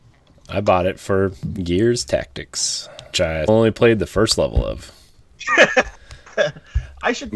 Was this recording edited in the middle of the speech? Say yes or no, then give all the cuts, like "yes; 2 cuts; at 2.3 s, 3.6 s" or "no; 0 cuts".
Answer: yes; 2 cuts; at 3.1 s, 3.5 s